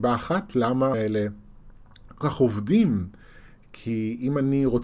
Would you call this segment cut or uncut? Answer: cut